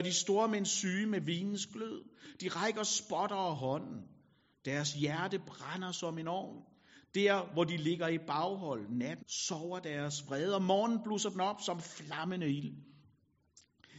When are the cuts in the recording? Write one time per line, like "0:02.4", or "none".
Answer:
0:09.2